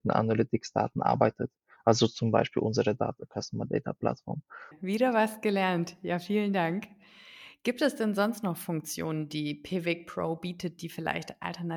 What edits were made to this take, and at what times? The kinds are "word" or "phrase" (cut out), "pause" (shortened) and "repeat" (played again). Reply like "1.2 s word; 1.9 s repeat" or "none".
none

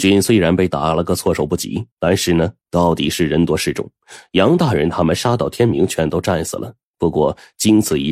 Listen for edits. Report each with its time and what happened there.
1.9 s pause

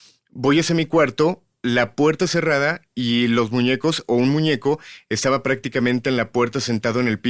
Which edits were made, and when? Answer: none

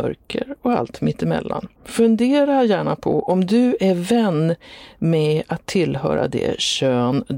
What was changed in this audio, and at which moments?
1.8 s pause

